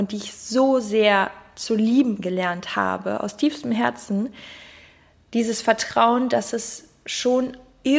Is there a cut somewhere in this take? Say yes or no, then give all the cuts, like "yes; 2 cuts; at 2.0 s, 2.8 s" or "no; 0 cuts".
no; 0 cuts